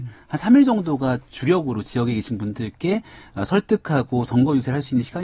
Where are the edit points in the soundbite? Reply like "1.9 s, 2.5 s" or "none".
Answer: none